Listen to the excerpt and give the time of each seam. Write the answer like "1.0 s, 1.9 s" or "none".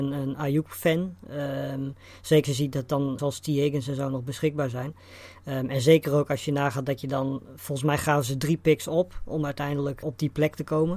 2.4 s, 3.2 s, 10.0 s